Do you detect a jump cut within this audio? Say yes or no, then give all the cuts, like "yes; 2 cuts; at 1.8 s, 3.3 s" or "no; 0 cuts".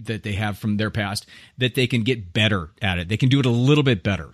no; 0 cuts